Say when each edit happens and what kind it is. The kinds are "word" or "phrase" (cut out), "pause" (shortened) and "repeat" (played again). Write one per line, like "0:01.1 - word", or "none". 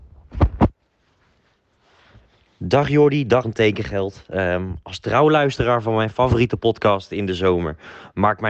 0:03.4 - word